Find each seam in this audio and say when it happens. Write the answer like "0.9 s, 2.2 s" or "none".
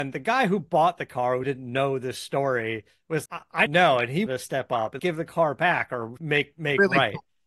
1.4 s, 3.3 s, 3.7 s, 4.3 s, 5.0 s, 6.2 s